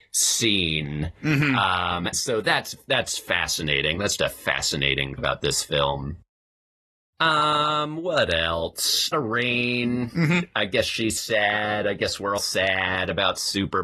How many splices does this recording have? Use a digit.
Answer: 5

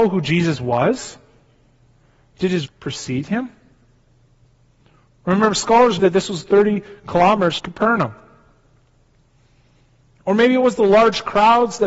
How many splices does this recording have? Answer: 3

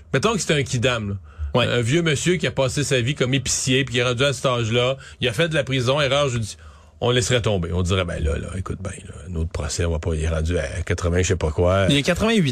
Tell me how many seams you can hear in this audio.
0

